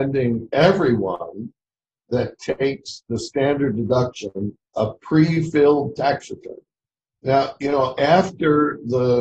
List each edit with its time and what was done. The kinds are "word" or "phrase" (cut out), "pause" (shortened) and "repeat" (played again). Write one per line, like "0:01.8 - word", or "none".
0:04.7 - pause